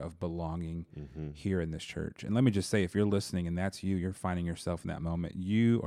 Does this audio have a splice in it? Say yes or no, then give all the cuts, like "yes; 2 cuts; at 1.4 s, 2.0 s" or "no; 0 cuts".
no; 0 cuts